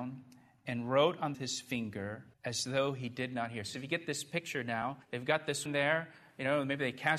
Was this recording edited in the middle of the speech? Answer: yes; 5 cuts; at 1.3 s, 2.3 s, 3.7 s, 5.0 s, 5.7 s

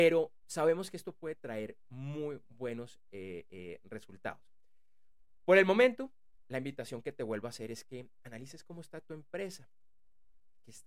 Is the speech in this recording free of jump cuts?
yes; 0 cuts

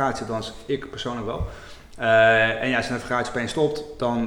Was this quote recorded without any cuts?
yes; 0 cuts

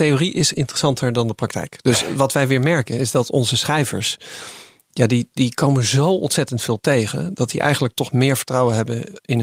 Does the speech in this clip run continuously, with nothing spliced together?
yes; 0 cuts

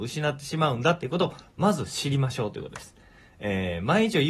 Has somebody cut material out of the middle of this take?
no; 0 cuts

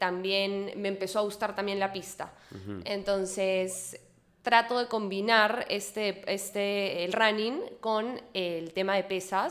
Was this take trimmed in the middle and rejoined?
no; 0 cuts

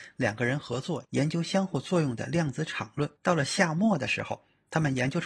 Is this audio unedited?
no; 1 cut; at 3.2 s

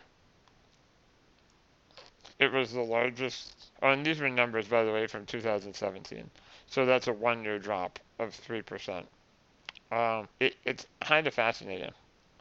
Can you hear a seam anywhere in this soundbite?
yes; 3 cuts; at 2.3 s, 3.7 s, 10.3 s

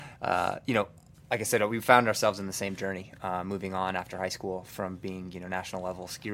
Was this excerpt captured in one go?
yes; 0 cuts

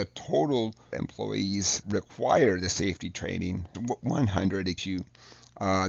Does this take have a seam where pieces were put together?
yes; 4 cuts; at 0.9 s, 1.8 s, 3.7 s, 4.8 s

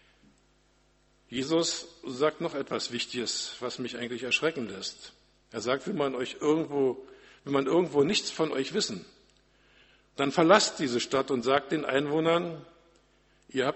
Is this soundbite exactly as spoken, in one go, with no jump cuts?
yes; 0 cuts

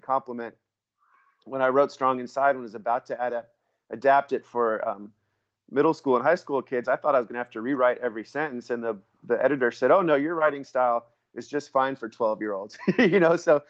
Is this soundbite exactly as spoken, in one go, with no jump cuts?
yes; 0 cuts

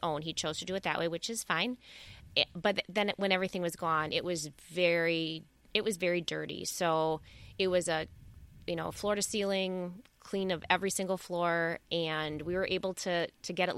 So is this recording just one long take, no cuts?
yes; 0 cuts

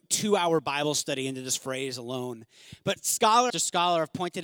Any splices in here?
yes; 1 cut; at 3.5 s

